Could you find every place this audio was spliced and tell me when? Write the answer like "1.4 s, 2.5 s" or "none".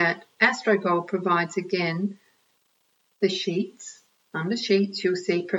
none